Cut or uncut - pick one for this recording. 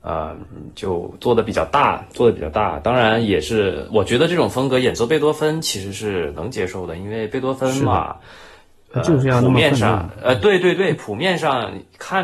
uncut